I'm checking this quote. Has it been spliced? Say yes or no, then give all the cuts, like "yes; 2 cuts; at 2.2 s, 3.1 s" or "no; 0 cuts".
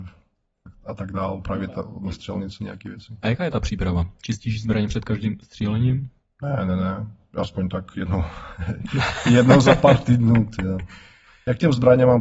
no; 0 cuts